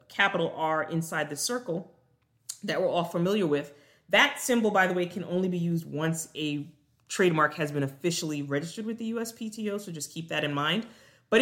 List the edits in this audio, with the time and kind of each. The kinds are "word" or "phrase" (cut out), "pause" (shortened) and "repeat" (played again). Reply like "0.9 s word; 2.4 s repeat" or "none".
none

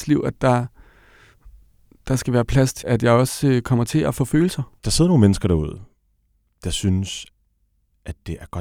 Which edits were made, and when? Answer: 2.8 s word; 4.8 s pause

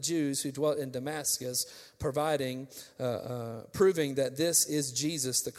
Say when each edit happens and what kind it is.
none

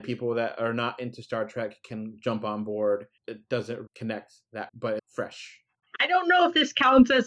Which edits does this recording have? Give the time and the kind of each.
3.2 s word; 3.9 s word; 4.7 s word; 5.0 s phrase

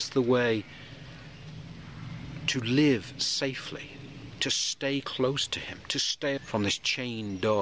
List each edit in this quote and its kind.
6.4 s word

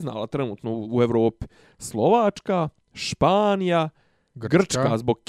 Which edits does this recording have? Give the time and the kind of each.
none

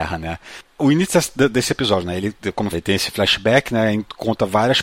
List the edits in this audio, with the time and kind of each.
2.7 s word

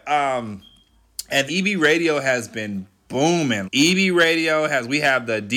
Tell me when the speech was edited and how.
1.5 s word; 3.6 s word

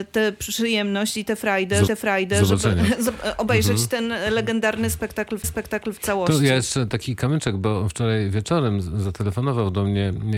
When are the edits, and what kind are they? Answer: 1.9 s repeat; 5.4 s repeat

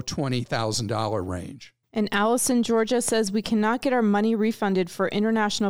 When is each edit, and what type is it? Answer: 1.8 s pause

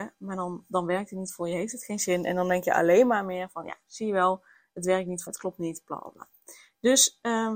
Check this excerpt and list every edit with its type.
5.3 s phrase

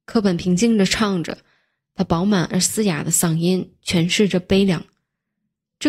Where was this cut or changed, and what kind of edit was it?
none

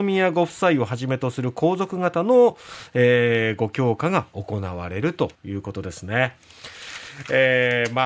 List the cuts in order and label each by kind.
5.3 s pause

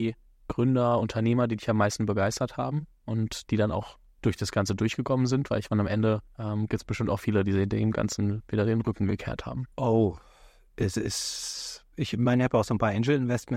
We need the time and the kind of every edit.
9.7 s pause

